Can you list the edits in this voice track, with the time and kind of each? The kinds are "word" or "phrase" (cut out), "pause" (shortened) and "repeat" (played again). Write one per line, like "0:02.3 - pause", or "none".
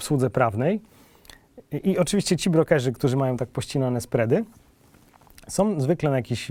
none

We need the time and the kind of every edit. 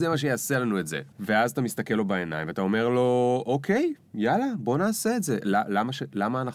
0:01.1 - pause

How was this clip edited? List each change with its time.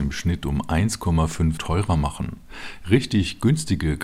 0:01.6 - word

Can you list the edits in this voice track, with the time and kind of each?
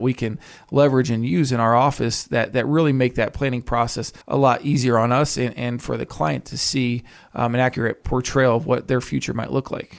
0:04.2 - pause

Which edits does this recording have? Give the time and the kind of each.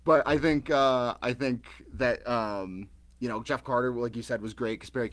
none

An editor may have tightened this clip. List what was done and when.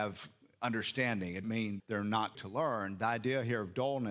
0:01.4 - word
0:01.8 - word
0:02.3 - word

